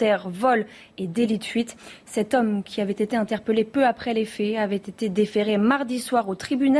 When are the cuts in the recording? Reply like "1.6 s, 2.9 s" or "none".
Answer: none